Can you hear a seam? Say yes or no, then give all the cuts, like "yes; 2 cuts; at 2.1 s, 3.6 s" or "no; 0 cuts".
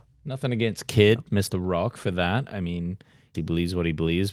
yes; 1 cut; at 3.3 s